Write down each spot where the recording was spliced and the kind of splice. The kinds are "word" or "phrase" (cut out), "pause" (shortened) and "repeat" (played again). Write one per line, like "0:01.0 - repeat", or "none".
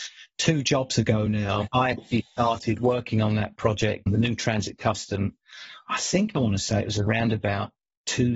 none